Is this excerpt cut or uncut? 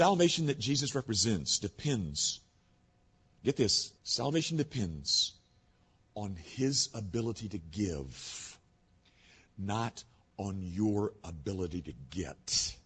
cut